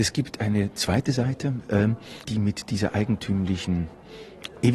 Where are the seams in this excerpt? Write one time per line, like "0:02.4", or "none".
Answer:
0:02.2